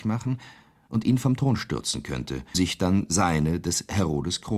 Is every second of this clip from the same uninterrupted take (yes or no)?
no